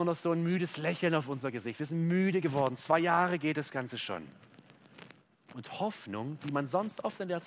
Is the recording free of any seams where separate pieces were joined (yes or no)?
yes